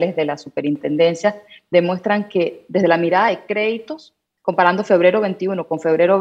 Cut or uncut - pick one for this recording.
uncut